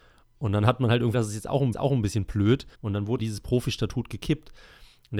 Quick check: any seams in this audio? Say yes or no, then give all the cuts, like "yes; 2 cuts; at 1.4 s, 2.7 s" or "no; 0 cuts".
yes; 4 cuts; at 1.1 s, 1.7 s, 2.7 s, 3.2 s